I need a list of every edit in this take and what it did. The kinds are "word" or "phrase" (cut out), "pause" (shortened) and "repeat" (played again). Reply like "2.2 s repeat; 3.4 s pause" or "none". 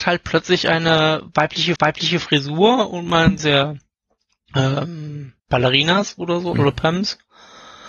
1.8 s repeat; 3.4 s phrase; 5.4 s pause; 6.5 s word